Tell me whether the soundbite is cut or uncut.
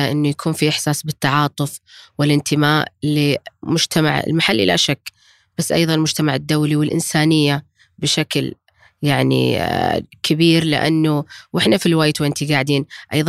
uncut